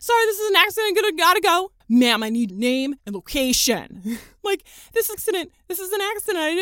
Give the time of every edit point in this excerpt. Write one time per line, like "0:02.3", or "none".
0:01.8
0:02.5
0:03.0
0:04.4
0:05.1

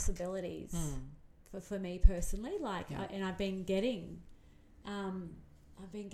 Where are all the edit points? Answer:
none

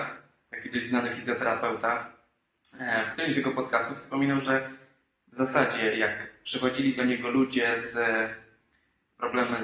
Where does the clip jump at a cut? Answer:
none

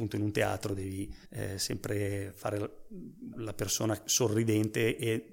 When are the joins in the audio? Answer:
0:01.3
0:03.3

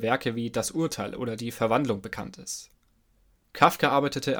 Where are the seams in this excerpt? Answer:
none

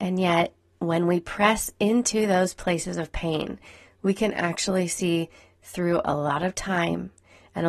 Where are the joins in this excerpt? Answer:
none

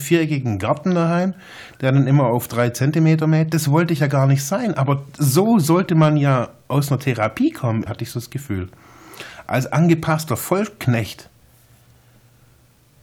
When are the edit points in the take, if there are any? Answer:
0:07.9

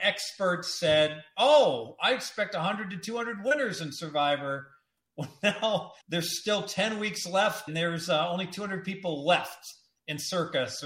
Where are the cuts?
0:06.0
0:07.7

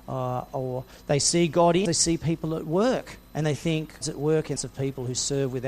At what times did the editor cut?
0:01.9
0:03.2
0:04.0
0:04.6

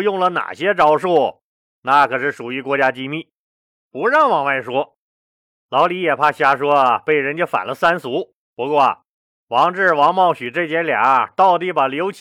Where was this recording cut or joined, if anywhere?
0:08.4

